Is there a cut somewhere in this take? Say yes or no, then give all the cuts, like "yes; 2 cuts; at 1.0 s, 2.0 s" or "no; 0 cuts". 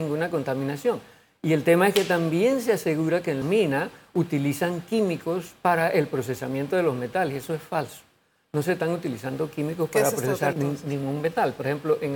yes; 2 cuts; at 3.4 s, 10.5 s